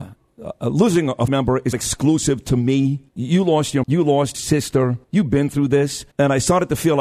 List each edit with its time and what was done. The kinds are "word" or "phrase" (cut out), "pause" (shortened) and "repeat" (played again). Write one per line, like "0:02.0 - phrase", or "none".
0:01.3 - word
0:01.7 - word
0:03.1 - pause
0:03.8 - word
0:04.3 - word
0:05.0 - pause
0:06.1 - pause